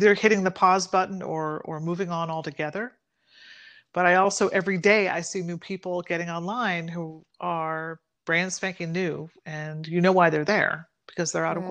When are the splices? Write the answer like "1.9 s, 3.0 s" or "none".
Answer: none